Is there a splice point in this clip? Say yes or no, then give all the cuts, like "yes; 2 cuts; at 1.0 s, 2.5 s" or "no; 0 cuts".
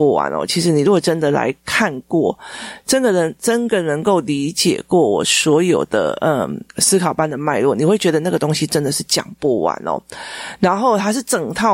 yes; 1 cut; at 6.7 s